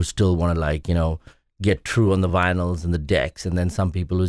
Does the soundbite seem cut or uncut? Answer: uncut